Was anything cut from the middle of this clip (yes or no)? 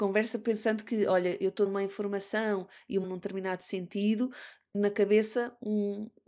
yes